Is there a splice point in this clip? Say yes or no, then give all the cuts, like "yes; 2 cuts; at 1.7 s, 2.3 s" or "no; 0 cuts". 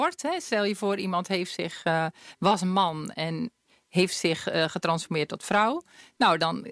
no; 0 cuts